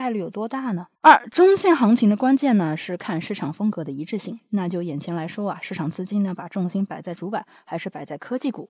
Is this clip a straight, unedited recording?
no; 1 cut; at 0.9 s

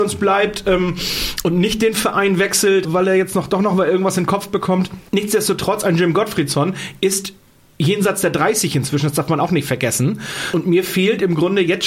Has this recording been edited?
yes; 1 cut; at 2.8 s

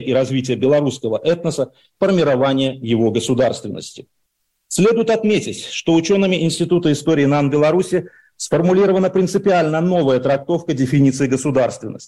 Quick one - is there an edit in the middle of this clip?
no; 0 cuts

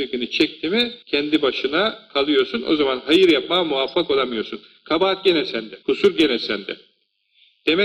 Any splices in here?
yes; 2 cuts; at 1.0 s, 5.8 s

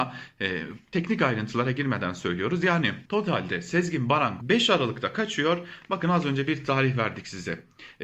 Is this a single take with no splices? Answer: no; 2 cuts; at 3.1 s, 4.4 s

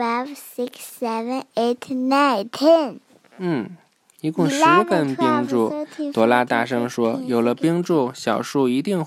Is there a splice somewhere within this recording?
no; 0 cuts

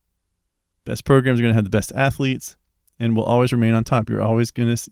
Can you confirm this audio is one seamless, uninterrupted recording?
yes; 0 cuts

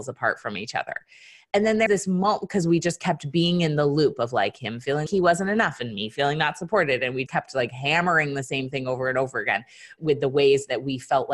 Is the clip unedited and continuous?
no; 4 cuts; at 1.9 s, 5.1 s, 7.3 s, 10.0 s

